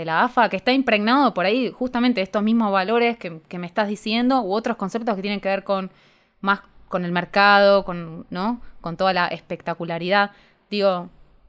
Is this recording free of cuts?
yes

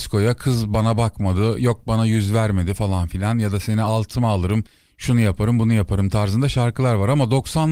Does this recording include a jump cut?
no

